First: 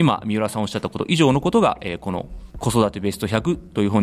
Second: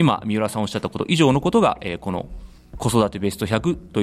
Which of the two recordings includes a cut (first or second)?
first